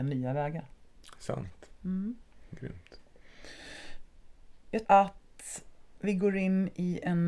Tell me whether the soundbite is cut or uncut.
cut